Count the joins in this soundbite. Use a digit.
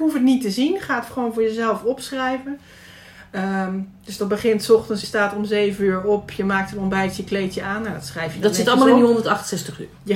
1